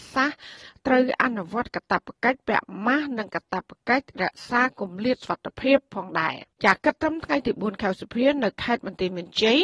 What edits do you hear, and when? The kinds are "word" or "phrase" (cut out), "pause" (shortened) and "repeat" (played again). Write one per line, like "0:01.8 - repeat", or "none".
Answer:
0:06.5 - pause